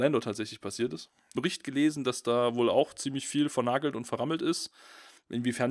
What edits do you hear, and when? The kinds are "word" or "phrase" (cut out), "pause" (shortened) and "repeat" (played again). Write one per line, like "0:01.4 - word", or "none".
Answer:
0:01.4 - phrase